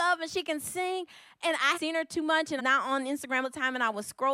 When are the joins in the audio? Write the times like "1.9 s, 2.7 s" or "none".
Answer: 1.7 s, 2.6 s, 3.4 s